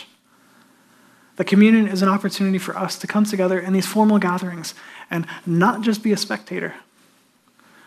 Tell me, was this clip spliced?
no; 0 cuts

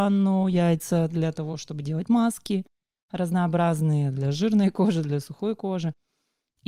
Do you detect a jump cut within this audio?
no; 0 cuts

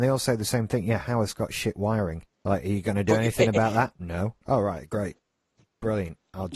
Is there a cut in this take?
yes; 2 cuts; at 2.3 s, 4.4 s

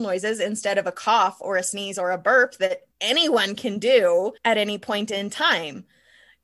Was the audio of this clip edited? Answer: yes; 2 cuts; at 2.9 s, 4.4 s

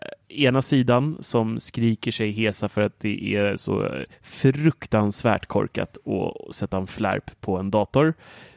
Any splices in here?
yes; 1 cut; at 4.1 s

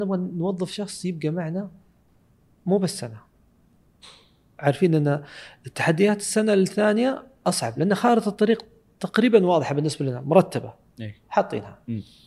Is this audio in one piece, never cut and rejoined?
yes; 0 cuts

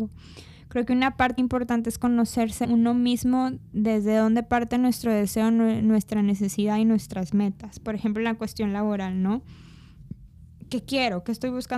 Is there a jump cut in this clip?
yes; 2 cuts; at 1.4 s, 2.6 s

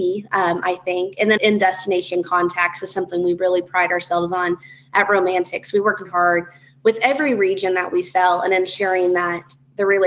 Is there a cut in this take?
yes; 2 cuts; at 1.4 s, 6.0 s

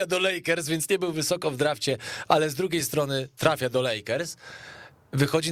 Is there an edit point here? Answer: no; 0 cuts

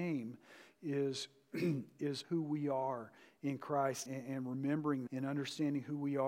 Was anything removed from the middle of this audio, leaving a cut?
yes; 3 cuts; at 2.2 s, 4.1 s, 5.1 s

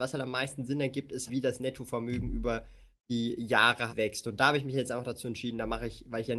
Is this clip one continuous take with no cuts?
no; 2 cuts; at 1.3 s, 3.9 s

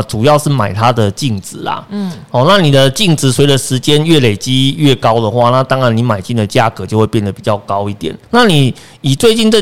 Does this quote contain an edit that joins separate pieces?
yes; 1 cut; at 8.2 s

